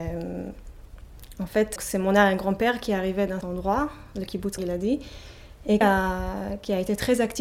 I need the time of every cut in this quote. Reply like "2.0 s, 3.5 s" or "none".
1.8 s, 3.4 s, 4.6 s, 5.8 s